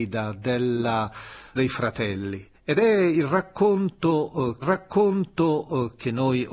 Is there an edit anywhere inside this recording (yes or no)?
yes